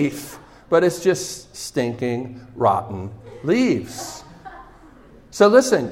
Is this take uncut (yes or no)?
yes